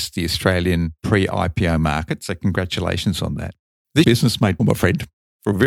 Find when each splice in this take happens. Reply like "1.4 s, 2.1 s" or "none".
1.0 s, 4.0 s, 4.6 s